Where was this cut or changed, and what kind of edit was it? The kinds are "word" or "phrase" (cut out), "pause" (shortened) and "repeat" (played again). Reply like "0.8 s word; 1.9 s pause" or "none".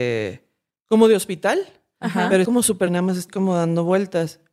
2.4 s word; 2.9 s word; 3.3 s word